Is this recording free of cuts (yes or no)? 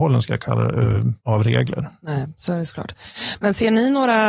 no